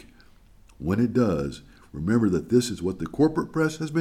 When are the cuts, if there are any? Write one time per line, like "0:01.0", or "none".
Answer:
none